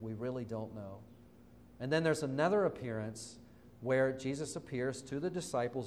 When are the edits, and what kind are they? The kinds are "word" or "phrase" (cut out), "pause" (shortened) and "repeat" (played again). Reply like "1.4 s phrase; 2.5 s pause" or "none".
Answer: none